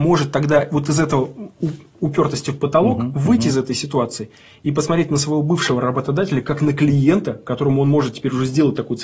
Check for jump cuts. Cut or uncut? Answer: uncut